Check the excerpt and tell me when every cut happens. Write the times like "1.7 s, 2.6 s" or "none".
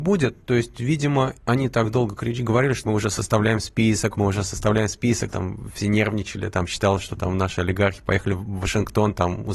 1.4 s, 2.8 s, 4.1 s, 5.3 s